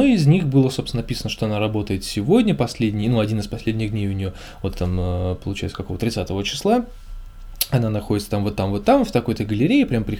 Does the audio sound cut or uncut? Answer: uncut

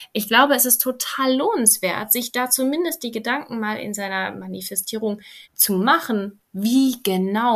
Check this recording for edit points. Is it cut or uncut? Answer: cut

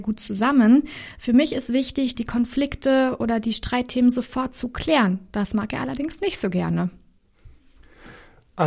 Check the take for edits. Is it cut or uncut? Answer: uncut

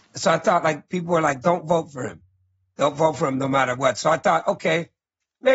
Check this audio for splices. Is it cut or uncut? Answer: uncut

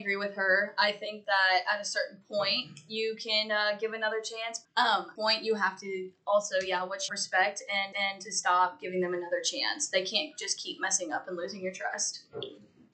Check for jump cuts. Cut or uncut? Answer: cut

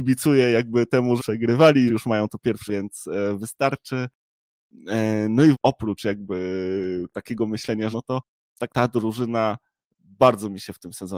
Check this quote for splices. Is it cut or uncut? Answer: cut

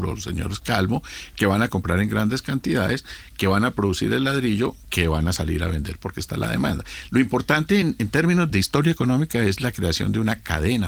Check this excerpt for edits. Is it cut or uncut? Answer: uncut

